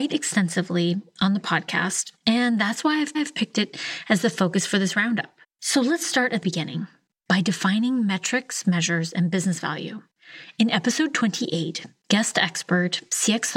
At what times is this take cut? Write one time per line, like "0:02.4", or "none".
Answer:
0:02.2
0:03.1
0:05.4
0:06.4